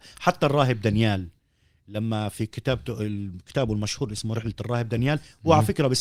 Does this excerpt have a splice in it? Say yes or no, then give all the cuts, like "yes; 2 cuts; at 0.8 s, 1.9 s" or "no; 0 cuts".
no; 0 cuts